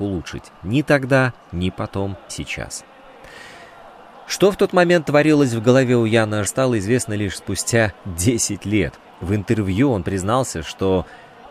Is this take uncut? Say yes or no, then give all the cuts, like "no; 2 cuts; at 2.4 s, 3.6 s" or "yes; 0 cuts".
no; 3 cuts; at 1.4 s, 2.3 s, 6.5 s